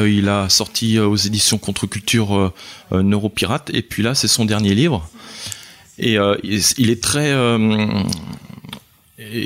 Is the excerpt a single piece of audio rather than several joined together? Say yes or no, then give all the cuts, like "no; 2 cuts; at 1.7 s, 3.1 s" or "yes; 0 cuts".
yes; 0 cuts